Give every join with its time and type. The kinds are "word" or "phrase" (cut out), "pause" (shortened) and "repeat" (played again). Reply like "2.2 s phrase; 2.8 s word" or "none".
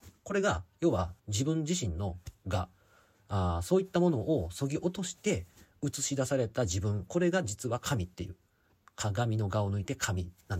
1.2 s pause